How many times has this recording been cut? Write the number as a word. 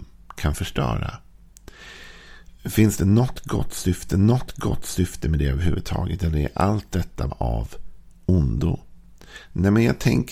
two